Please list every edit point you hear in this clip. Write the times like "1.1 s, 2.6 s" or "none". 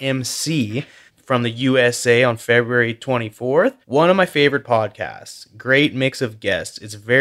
1.1 s, 3.8 s